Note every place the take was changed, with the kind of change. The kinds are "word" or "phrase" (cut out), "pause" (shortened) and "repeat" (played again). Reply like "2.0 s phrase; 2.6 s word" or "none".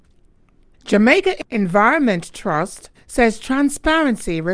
2.9 s pause

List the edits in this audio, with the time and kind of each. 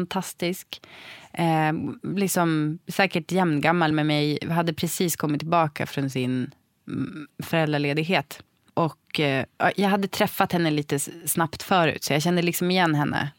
none

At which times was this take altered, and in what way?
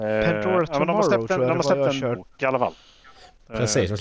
2.1 s word

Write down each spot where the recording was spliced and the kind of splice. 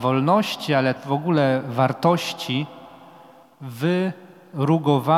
1.0 s word

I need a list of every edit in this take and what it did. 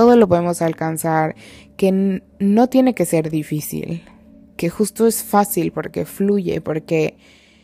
none

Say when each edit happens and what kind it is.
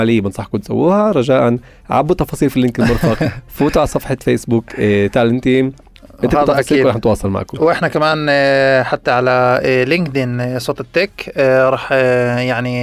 none

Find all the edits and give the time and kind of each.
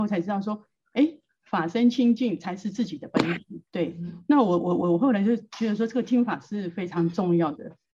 3.7 s pause

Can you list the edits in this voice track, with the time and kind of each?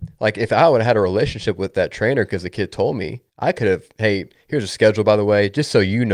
1.7 s word; 3.3 s pause

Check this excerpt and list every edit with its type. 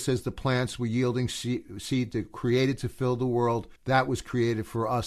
3.8 s pause

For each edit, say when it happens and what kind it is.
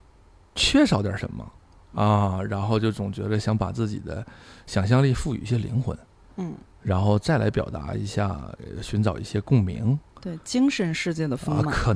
1.9 s word

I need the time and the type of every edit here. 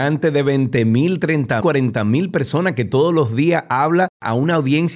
1.6 s word

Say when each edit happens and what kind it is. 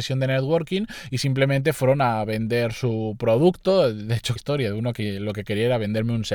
4.4 s phrase

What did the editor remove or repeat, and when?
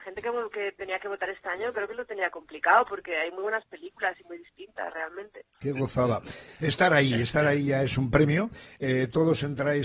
5.5 s pause

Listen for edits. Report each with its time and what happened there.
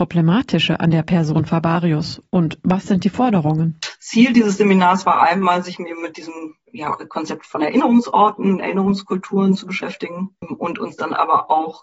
6.6 s pause

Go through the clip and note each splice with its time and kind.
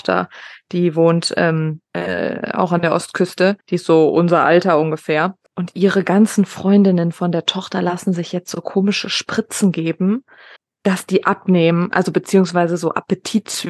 1.8 s pause; 3.6 s pause; 5.5 s pause; 10.6 s pause

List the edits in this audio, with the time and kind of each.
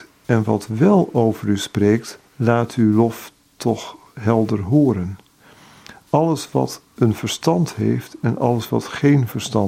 2.2 s pause; 6.9 s pause

